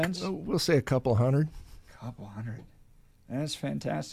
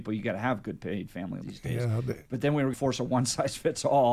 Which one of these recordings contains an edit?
second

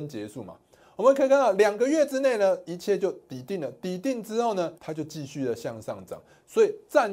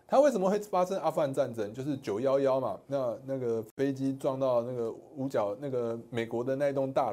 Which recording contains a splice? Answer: first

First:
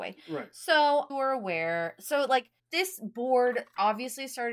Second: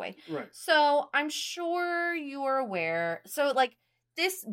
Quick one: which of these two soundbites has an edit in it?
first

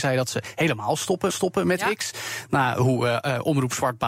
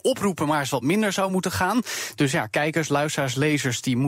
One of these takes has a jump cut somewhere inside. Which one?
first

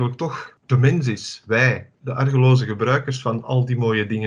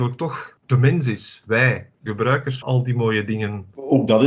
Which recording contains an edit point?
second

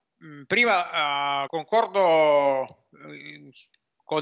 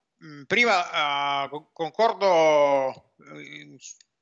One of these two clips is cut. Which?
first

